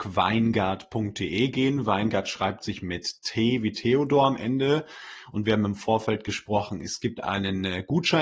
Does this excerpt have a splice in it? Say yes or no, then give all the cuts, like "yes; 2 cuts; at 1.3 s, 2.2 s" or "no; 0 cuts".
no; 0 cuts